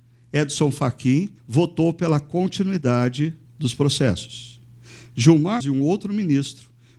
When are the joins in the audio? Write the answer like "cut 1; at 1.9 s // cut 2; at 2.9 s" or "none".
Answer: cut 1; at 1.4 s // cut 2; at 3.4 s // cut 3; at 5.6 s